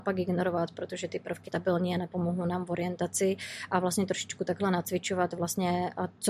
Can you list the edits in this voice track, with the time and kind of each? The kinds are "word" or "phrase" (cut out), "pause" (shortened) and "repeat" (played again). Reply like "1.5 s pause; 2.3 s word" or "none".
1.4 s word